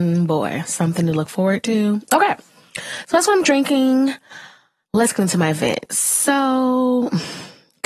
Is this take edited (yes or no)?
no